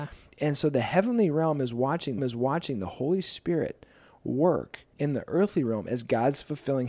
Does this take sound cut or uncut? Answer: cut